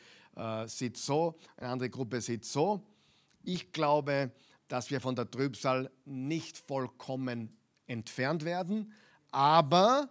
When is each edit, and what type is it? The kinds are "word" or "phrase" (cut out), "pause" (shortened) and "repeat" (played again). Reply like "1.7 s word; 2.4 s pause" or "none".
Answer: none

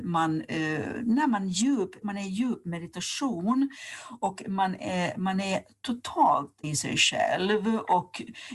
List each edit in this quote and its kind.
2.0 s word; 6.6 s word

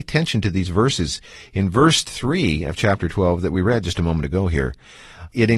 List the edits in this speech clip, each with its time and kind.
none

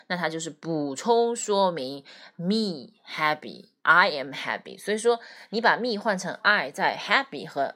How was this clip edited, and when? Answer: none

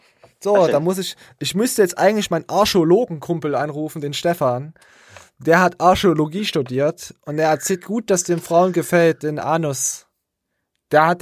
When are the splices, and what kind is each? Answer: 7.8 s phrase

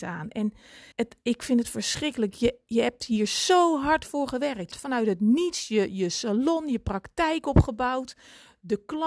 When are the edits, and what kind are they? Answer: 0.9 s pause; 4.7 s phrase

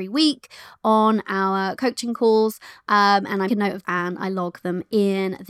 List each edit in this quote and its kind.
1.8 s word; 3.5 s word; 3.8 s word

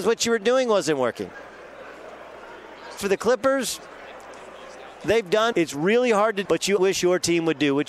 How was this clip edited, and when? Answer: 3.0 s word; 5.5 s word; 6.5 s word; 6.8 s word

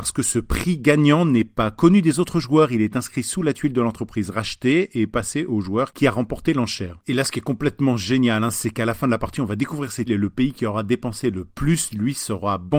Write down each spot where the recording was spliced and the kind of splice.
10.1 s word

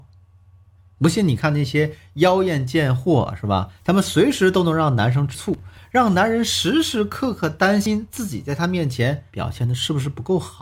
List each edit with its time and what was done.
9.3 s pause

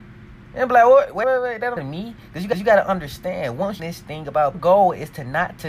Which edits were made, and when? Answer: 1.2 s word; 1.8 s word; 2.5 s repeat; 3.8 s phrase; 4.5 s phrase

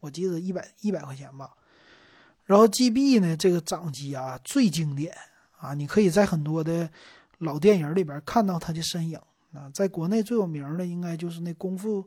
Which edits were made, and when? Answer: none

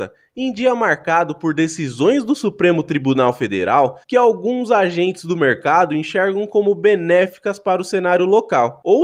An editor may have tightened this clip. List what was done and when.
4.0 s pause

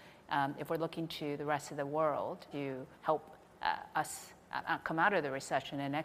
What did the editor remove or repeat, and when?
2.5 s word; 2.9 s pause

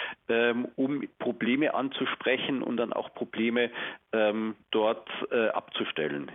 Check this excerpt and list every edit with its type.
4.6 s pause

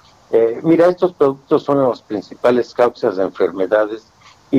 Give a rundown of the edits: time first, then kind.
none

